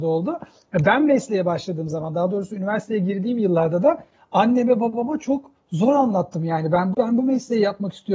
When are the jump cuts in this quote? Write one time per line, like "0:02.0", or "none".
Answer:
0:06.9